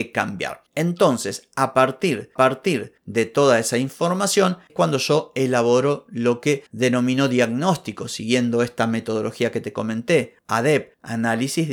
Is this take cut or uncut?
cut